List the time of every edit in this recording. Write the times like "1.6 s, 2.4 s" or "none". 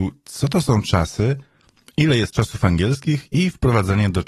none